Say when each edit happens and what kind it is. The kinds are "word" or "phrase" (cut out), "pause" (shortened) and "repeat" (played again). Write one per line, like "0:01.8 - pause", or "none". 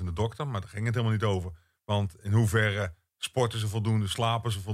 none